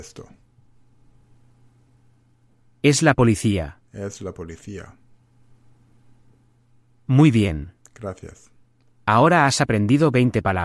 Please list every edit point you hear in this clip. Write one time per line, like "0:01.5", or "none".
none

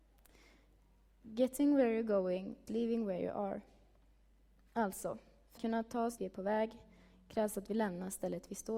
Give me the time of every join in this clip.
0:02.7
0:05.6
0:06.2

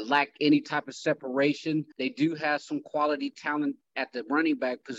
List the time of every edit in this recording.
0:01.9

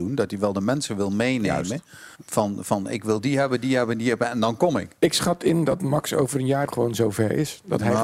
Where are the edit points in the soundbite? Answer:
0:02.1
0:06.7

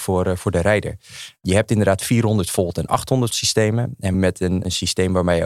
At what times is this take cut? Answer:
0:03.3
0:04.1

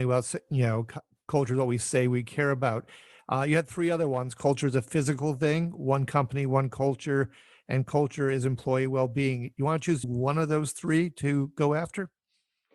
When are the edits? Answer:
0:10.0

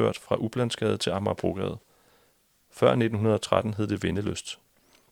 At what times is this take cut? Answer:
none

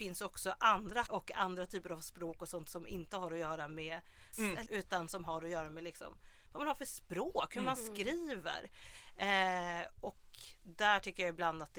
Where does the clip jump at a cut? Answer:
0:01.1
0:04.3
0:04.7

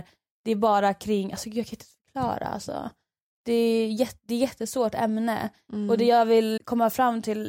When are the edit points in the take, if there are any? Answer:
0:06.6

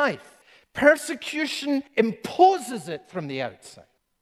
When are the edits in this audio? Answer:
0:01.9

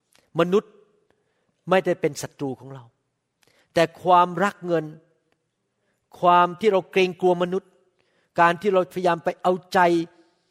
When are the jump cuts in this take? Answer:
none

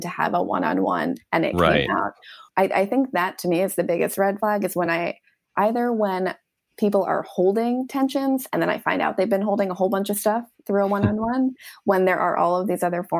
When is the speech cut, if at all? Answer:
none

